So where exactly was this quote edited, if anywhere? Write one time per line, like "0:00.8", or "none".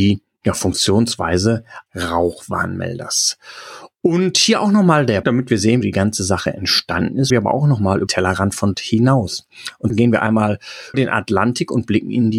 0:01.9
0:05.2
0:05.8
0:07.3
0:08.1
0:08.7
0:09.9
0:10.9

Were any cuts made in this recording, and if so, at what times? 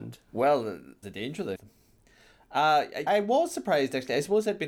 0:01.0
0:01.6
0:03.1

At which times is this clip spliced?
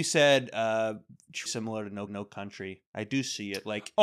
0:01.5
0:02.1

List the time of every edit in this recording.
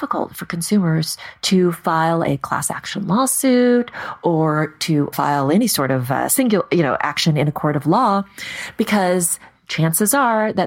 0:05.1

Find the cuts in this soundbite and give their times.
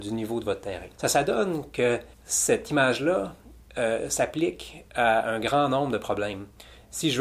0:00.9
0:02.1

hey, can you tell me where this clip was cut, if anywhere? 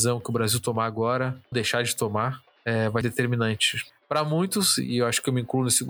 0:01.5
0:03.0

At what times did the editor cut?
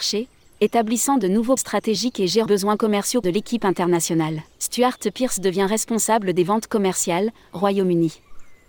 0:01.6
0:02.5
0:03.2
0:04.5

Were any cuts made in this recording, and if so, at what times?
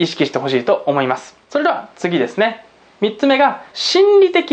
0:01.4

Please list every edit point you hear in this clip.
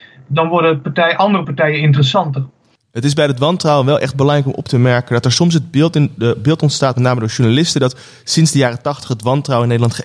none

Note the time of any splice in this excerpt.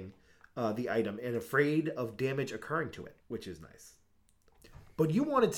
0:03.2

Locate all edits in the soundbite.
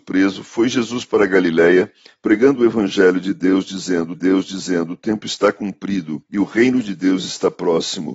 0:04.1
0:06.3

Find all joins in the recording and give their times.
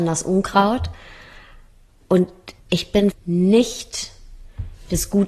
0:02.6
0:03.1

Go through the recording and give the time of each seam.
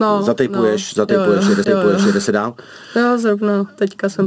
0:01.6

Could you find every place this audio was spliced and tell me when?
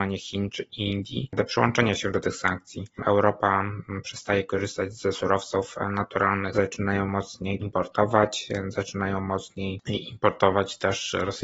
0:06.5
0:07.6

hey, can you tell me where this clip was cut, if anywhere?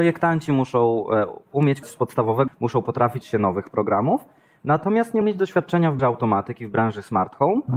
0:01.8
0:02.5
0:03.2
0:05.2
0:06.0

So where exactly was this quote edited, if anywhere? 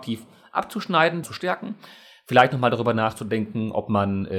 0:01.2

